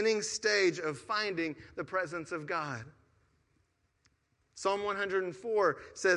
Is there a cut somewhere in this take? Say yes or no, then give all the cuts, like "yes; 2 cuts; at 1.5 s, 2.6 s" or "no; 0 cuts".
no; 0 cuts